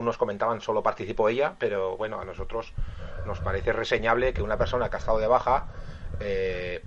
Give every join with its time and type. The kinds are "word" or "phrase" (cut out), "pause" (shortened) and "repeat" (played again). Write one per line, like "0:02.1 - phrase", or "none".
none